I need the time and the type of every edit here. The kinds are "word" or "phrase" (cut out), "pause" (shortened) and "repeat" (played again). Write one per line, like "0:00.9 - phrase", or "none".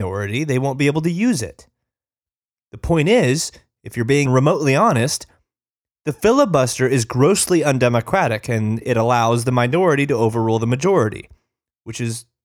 0:04.3 - word